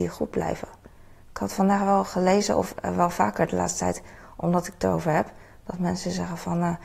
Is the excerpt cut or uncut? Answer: uncut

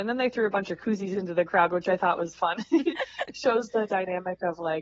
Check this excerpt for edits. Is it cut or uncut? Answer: cut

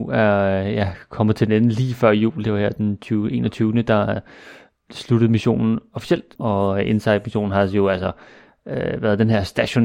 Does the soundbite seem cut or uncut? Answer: uncut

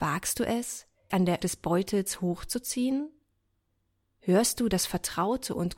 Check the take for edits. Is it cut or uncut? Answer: cut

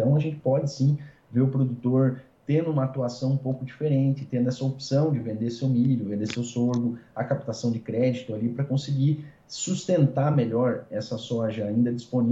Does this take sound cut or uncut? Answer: uncut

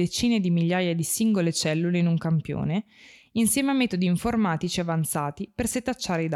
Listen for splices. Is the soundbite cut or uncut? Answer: uncut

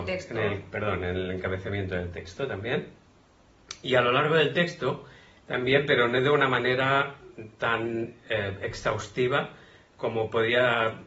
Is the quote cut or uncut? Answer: cut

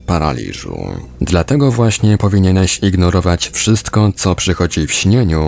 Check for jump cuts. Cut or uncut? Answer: uncut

